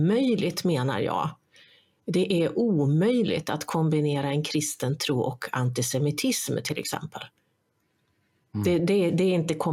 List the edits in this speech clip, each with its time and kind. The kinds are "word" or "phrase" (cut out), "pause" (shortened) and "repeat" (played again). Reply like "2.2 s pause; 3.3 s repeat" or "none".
none